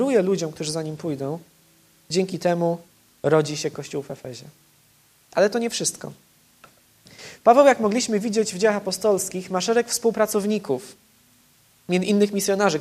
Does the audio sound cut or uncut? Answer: uncut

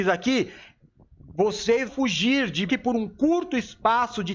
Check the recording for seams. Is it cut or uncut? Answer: cut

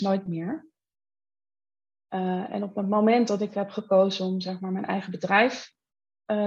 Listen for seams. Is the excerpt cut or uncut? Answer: uncut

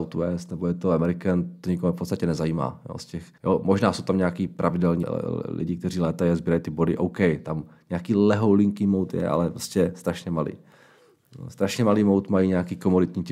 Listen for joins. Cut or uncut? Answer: cut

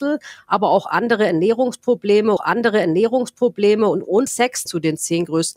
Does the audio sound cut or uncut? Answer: cut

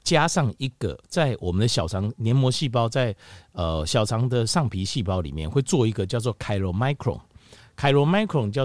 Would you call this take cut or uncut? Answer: uncut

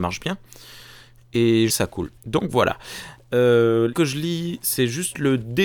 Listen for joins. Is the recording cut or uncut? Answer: cut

